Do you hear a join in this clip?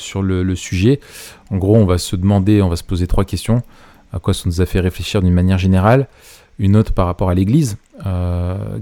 no; 0 cuts

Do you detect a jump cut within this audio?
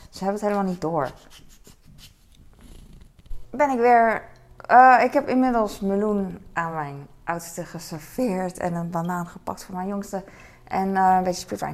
no; 0 cuts

